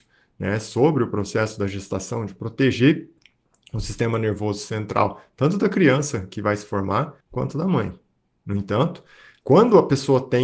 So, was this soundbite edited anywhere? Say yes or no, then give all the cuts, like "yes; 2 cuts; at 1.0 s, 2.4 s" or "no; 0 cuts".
yes; 2 cuts; at 7.2 s, 9.4 s